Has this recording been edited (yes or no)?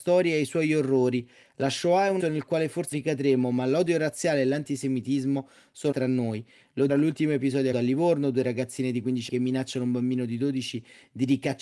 yes